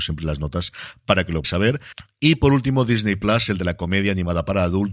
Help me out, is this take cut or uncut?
cut